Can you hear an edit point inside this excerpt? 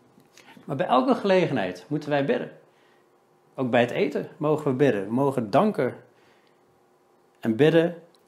no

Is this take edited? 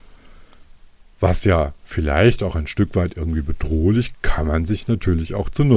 yes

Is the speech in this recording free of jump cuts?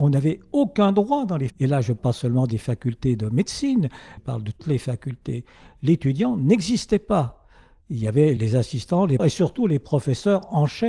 no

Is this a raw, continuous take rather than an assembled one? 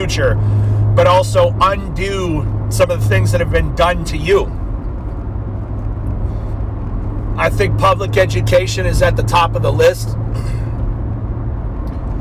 yes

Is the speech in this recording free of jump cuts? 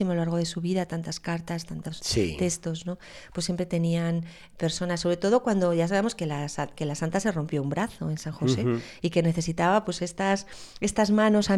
yes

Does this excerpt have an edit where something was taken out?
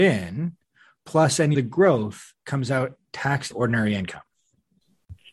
yes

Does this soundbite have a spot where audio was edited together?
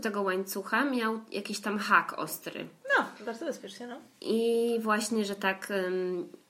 no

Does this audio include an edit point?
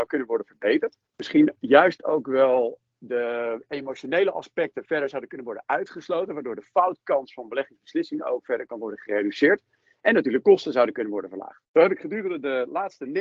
yes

